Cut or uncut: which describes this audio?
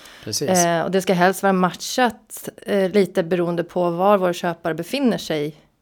uncut